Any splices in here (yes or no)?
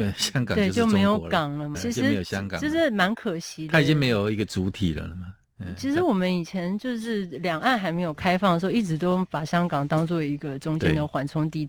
yes